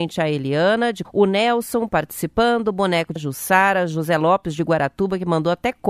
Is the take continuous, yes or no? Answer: no